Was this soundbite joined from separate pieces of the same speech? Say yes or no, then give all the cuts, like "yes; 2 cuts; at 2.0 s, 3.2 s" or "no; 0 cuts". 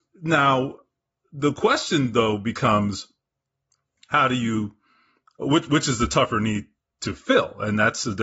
no; 0 cuts